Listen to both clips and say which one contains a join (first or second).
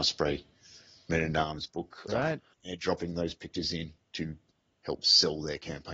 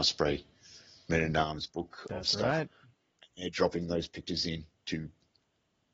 first